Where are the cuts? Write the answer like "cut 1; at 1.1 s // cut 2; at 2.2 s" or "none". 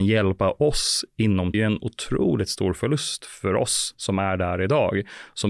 cut 1; at 1.5 s